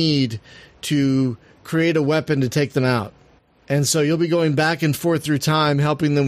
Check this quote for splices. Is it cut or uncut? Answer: cut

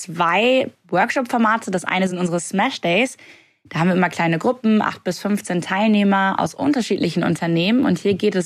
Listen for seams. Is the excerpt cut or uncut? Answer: uncut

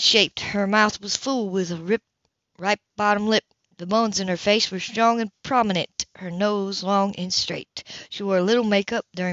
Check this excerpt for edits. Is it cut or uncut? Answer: uncut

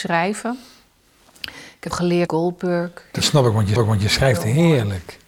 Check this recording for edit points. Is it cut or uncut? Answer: cut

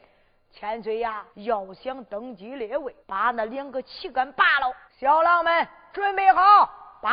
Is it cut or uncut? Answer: cut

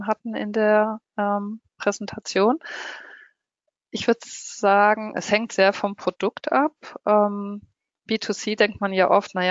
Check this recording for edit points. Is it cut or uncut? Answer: uncut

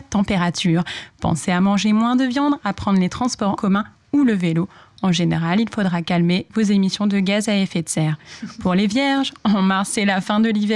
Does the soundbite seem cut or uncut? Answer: cut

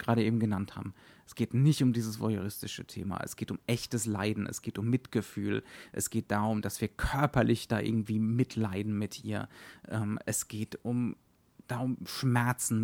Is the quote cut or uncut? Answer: uncut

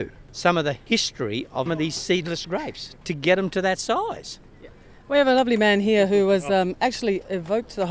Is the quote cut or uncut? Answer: cut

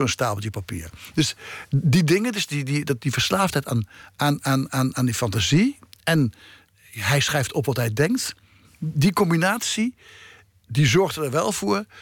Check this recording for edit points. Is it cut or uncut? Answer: uncut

